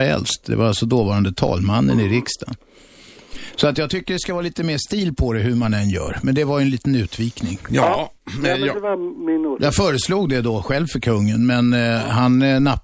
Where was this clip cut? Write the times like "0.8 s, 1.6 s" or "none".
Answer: none